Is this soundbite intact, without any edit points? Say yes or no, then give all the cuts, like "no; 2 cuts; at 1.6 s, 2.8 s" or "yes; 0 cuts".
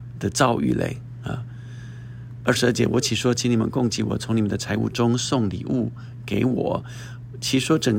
yes; 0 cuts